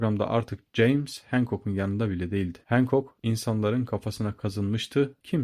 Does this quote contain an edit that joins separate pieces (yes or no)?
no